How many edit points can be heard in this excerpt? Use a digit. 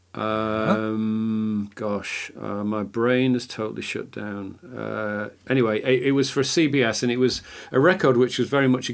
0